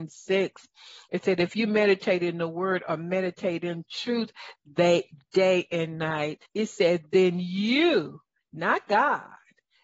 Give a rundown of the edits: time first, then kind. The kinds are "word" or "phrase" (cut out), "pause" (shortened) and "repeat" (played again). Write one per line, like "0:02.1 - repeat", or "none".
0:06.5 - pause